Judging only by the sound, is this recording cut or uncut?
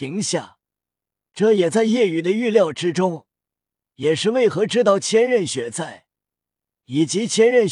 uncut